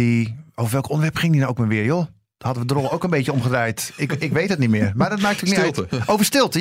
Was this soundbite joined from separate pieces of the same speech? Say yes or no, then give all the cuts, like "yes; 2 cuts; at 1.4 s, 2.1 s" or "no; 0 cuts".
no; 0 cuts